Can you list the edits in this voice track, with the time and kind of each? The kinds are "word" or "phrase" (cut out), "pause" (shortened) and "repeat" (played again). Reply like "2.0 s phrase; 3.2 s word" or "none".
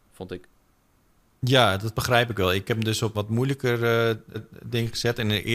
1.9 s word; 2.6 s word; 3.1 s word; 4.3 s repeat